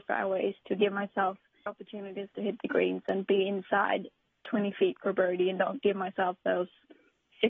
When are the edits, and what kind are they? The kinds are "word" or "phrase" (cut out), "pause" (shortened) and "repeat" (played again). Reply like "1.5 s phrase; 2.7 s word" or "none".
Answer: 1.7 s word